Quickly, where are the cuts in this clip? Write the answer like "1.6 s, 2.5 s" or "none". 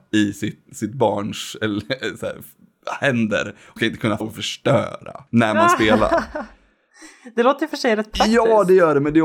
3.8 s, 4.2 s, 5.3 s